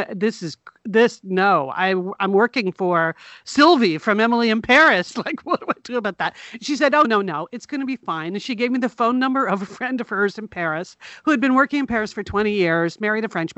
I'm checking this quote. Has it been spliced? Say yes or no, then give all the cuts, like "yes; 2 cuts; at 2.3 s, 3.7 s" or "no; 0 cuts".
yes; 1 cut; at 7.0 s